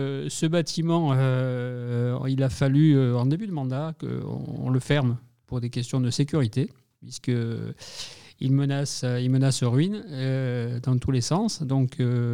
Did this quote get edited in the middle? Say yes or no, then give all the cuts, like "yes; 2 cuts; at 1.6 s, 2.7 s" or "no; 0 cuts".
no; 0 cuts